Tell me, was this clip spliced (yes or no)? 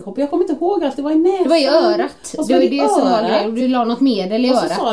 no